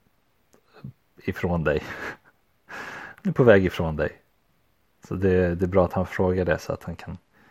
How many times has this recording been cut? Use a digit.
0